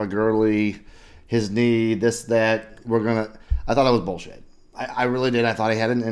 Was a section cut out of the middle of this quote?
no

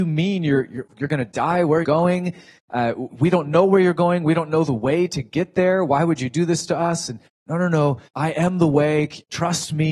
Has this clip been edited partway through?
yes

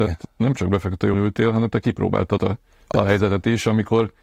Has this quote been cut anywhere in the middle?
yes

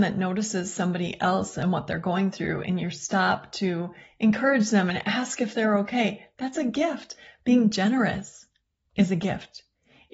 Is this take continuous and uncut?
yes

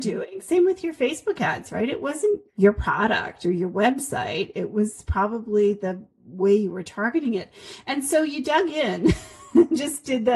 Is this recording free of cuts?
no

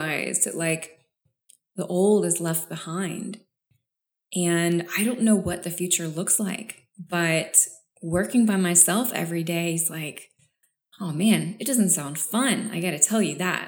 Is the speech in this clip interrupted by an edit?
no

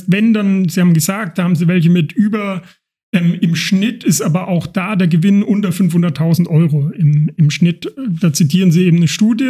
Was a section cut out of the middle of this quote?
no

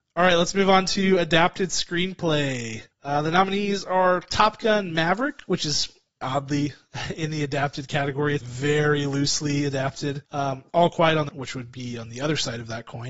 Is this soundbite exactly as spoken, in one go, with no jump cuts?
no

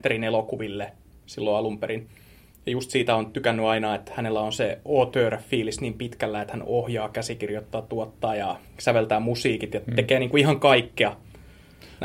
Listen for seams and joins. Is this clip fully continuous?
no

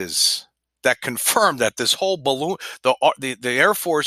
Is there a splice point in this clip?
no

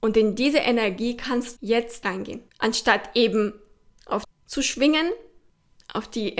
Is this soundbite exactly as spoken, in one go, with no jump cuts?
no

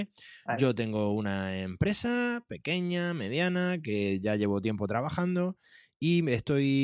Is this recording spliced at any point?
no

